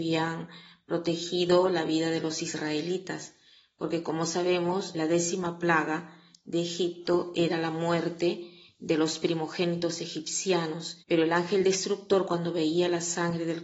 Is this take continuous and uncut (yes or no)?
no